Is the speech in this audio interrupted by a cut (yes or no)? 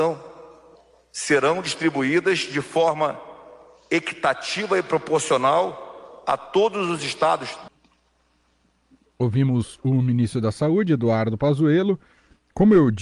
no